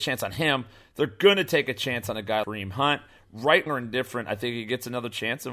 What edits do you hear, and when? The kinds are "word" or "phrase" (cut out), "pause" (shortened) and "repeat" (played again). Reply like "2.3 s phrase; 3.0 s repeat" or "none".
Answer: 2.4 s word; 3.7 s word

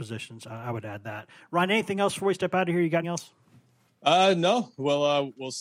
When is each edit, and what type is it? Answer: 3.0 s word

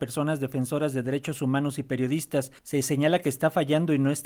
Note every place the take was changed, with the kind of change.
2.6 s pause

